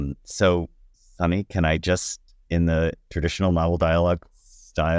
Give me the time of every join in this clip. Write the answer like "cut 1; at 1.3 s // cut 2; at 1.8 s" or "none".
none